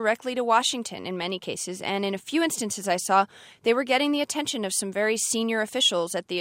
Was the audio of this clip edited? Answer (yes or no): no